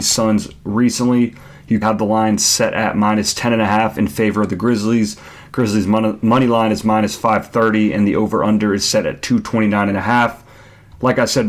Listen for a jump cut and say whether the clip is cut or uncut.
cut